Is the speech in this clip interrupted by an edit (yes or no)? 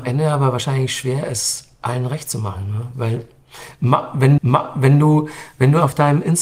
yes